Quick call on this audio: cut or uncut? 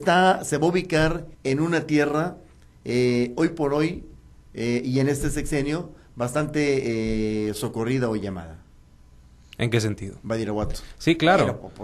cut